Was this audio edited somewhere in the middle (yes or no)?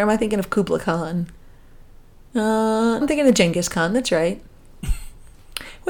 yes